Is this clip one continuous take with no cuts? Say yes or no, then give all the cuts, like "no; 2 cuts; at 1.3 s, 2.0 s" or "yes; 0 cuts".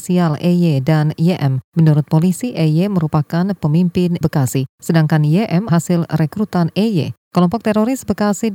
no; 2 cuts; at 4.2 s, 5.7 s